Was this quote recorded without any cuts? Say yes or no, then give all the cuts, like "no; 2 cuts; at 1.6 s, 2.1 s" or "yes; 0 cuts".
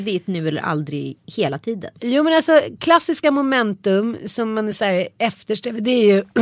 yes; 0 cuts